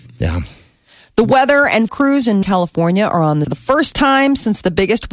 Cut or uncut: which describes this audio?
cut